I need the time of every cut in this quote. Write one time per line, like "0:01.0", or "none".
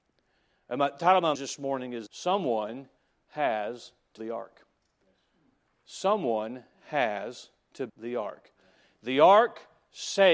0:01.3
0:02.1
0:04.2
0:07.9